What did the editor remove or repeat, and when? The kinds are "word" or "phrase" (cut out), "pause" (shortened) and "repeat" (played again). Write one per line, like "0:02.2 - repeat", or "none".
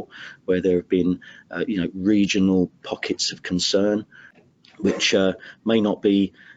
none